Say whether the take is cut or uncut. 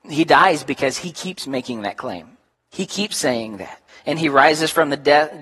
cut